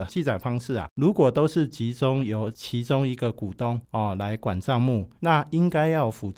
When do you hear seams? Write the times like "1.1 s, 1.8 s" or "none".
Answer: 5.2 s